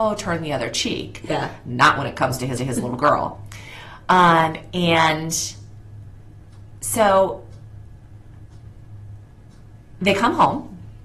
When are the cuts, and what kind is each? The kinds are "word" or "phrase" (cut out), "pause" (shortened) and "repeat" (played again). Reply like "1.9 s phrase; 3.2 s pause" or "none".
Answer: 2.6 s repeat